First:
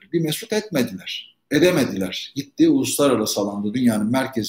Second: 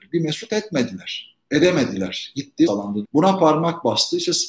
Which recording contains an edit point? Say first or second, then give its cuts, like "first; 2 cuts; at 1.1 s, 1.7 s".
second; 2 cuts; at 2.7 s, 3.0 s